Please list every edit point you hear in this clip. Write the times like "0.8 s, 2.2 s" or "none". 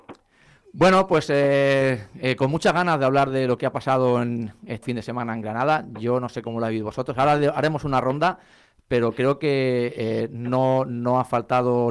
4.8 s